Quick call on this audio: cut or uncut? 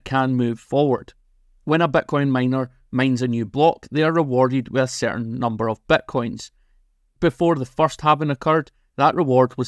uncut